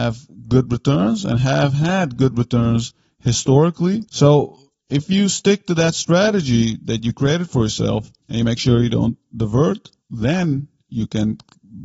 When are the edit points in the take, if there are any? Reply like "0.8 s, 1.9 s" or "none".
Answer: 4.1 s, 8.2 s, 10.0 s

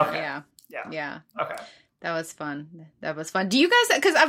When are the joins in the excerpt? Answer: none

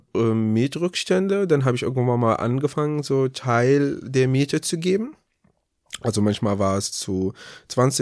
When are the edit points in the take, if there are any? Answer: none

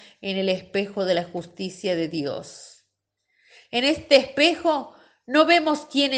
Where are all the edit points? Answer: none

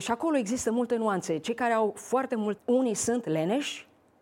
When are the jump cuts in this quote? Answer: 2.6 s

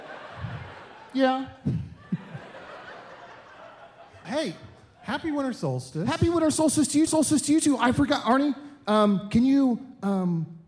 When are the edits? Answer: 4.2 s, 7.1 s

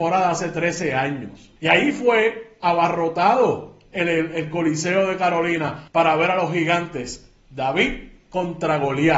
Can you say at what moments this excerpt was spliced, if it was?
1.6 s, 5.9 s

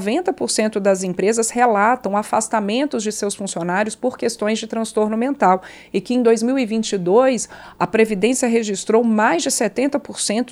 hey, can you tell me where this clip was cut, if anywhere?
7.8 s

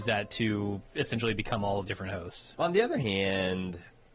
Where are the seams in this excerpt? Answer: 1.9 s

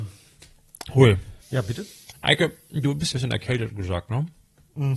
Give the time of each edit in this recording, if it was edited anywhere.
1.4 s, 3.1 s, 3.7 s

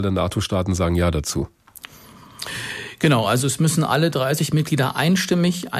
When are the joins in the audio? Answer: none

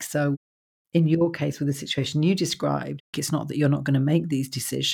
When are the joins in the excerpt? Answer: 3.1 s

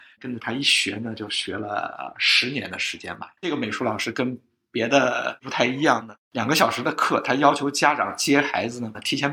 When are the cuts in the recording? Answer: 2.1 s, 3.4 s, 6.2 s

